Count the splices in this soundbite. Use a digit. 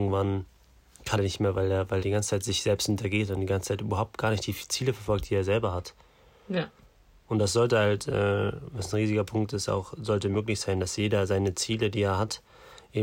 2